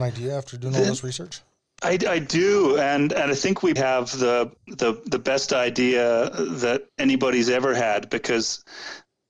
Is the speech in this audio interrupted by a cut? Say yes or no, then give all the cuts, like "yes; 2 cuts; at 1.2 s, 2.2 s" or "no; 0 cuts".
yes; 3 cuts; at 1.6 s, 3.8 s, 4.6 s